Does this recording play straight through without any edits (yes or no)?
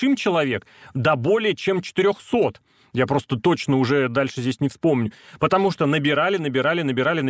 yes